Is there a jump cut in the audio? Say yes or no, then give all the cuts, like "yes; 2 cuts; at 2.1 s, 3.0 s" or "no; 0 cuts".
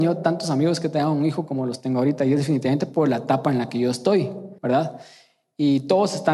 yes; 1 cut; at 4.6 s